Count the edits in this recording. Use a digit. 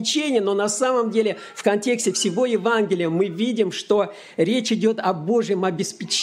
0